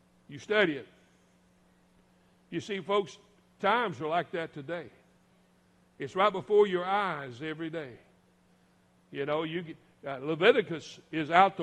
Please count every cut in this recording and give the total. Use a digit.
0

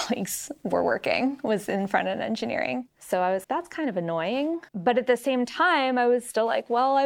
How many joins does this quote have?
2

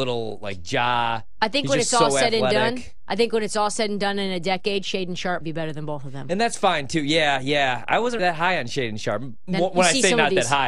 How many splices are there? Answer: 2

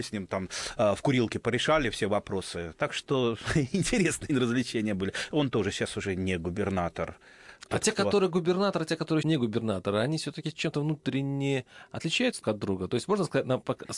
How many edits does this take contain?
3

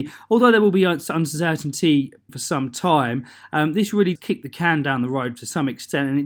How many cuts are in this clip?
2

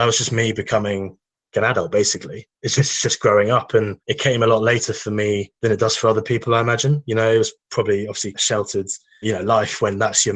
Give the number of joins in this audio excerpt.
6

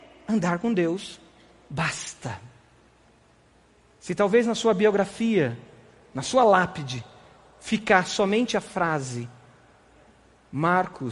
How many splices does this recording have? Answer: 0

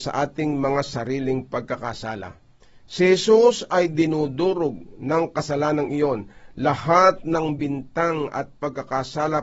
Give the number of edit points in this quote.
0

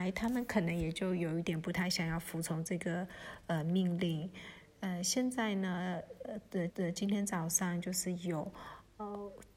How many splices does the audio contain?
1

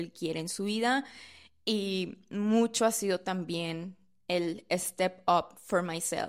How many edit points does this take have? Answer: 0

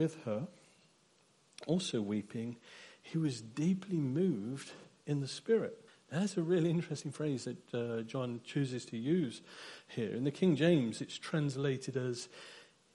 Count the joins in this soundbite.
1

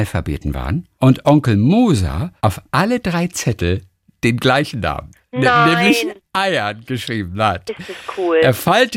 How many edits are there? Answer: 2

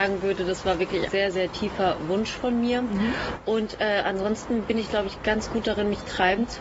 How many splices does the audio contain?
1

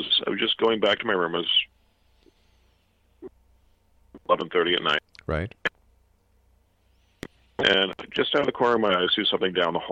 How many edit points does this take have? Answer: 0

